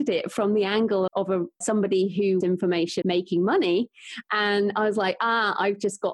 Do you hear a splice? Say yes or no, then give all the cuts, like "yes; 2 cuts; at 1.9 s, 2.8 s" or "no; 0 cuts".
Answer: yes; 4 cuts; at 1.1 s, 1.6 s, 2.4 s, 3.0 s